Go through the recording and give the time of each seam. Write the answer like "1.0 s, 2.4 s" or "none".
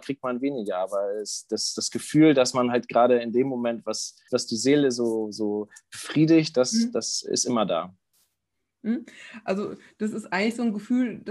4.3 s

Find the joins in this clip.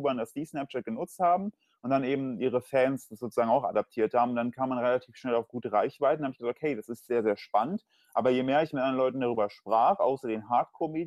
none

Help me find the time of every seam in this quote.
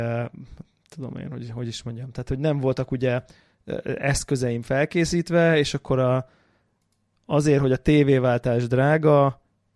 none

